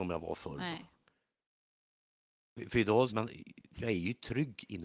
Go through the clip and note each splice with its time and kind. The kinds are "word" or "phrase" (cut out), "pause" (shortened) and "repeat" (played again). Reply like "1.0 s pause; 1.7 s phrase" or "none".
3.1 s word